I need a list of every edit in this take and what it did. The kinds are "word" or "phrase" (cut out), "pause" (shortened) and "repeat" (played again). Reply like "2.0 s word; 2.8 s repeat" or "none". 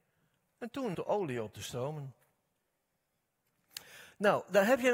0.9 s word